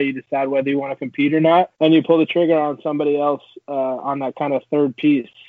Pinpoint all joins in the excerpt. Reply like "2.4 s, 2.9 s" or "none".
1.7 s

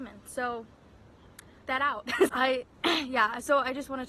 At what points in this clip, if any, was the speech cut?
1.6 s, 2.3 s

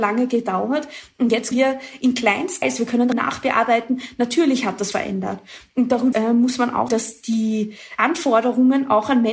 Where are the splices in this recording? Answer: 1.5 s, 2.6 s, 3.1 s, 4.9 s, 6.1 s, 6.9 s

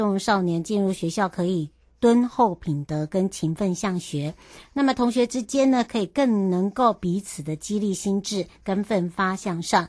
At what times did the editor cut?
none

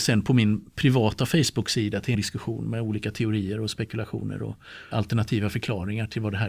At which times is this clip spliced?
2.1 s, 4.9 s

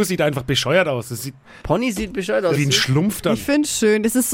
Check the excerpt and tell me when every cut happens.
1.4 s, 2.5 s

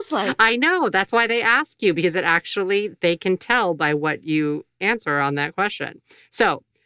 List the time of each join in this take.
none

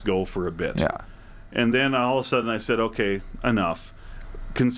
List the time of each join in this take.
none

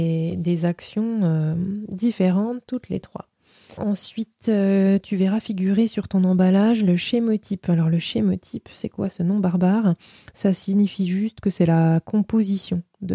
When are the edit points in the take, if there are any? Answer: none

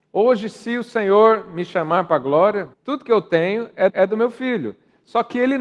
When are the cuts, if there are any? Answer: 2.7 s, 3.9 s

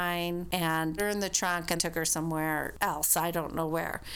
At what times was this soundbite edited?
1.0 s, 1.8 s

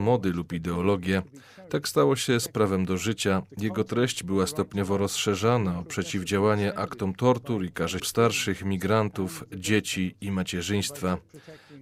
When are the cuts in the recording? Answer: 8.0 s

